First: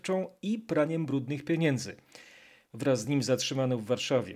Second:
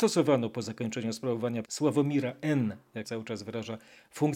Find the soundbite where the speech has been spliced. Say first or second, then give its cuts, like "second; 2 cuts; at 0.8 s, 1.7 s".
second; 2 cuts; at 1.7 s, 3.0 s